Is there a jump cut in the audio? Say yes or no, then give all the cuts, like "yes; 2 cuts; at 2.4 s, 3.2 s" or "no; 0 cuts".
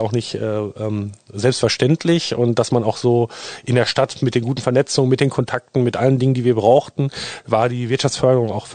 no; 0 cuts